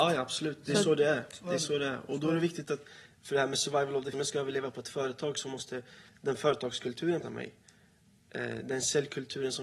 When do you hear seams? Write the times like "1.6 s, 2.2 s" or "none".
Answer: 4.1 s, 7.2 s